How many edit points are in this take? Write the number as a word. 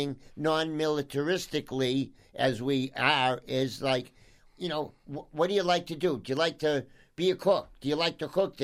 two